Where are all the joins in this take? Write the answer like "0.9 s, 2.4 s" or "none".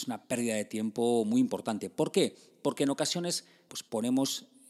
3.7 s